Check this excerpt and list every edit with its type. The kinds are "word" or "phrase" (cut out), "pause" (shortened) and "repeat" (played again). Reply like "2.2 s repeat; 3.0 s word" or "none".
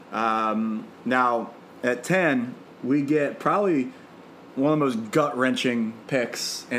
none